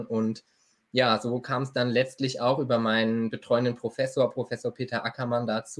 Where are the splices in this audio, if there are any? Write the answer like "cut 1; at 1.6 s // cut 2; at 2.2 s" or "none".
none